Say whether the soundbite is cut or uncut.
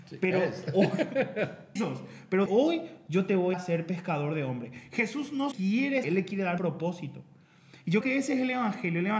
cut